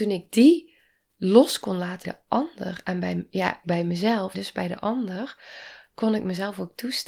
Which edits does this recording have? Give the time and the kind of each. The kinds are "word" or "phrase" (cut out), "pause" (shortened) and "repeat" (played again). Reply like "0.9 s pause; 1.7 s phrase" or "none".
2.0 s word; 3.6 s word; 4.3 s word